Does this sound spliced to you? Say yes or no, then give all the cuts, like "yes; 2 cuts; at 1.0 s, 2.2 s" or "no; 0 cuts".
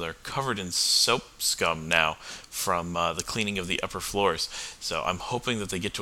no; 0 cuts